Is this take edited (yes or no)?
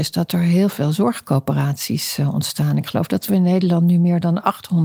no